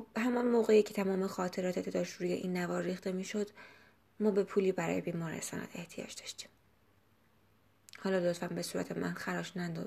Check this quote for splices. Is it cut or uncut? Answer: uncut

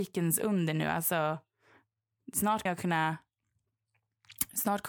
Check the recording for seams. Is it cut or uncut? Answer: cut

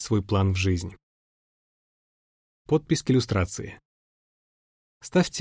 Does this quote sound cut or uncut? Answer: uncut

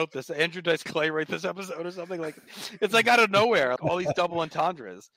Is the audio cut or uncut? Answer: cut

